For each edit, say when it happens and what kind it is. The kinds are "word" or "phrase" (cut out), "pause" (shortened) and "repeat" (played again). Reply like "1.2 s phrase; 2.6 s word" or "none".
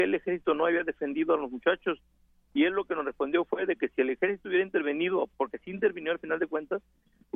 none